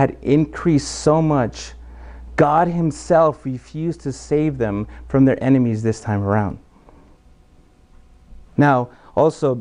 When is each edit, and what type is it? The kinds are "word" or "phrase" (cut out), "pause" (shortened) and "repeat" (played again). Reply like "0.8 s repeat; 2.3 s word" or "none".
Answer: 8.5 s pause